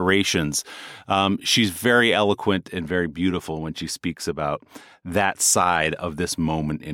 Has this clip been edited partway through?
no; 0 cuts

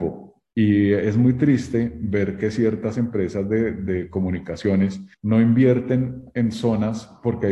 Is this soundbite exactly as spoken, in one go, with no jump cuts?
no; 1 cut; at 5.1 s

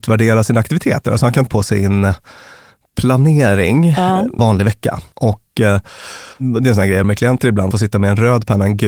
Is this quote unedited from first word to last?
no; 5 cuts; at 1.5 s, 4.4 s, 6.3 s, 7.0 s, 7.7 s

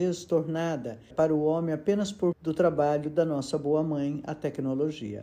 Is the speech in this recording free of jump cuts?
no; 2 cuts; at 1.1 s, 2.3 s

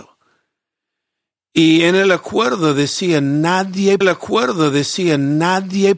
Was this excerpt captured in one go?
no; 1 cut; at 4.0 s

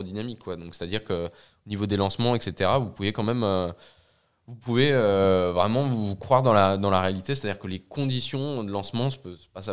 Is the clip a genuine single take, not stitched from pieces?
yes; 0 cuts

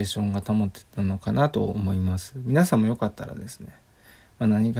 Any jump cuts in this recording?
no; 0 cuts

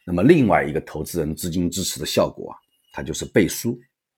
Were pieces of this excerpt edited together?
no; 0 cuts

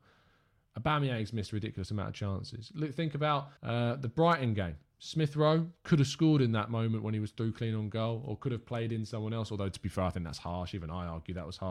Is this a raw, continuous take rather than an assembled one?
no; 1 cut; at 3.6 s

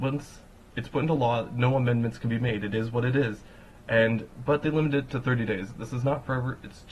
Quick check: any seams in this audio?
no; 0 cuts

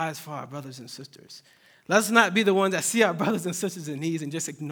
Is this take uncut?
yes; 0 cuts

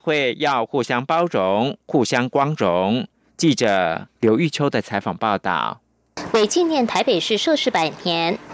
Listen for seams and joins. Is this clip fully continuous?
yes; 0 cuts

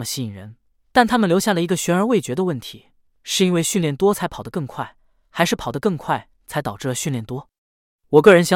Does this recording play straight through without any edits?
yes; 0 cuts

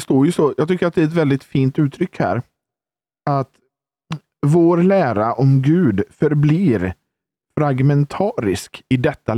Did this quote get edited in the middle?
no; 0 cuts

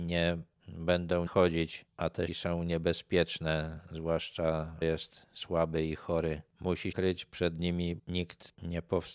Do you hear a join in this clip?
yes; 5 cuts; at 1.3 s, 2.3 s, 4.8 s, 6.9 s, 8.0 s

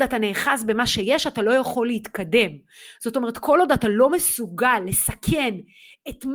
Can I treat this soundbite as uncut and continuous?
yes; 0 cuts

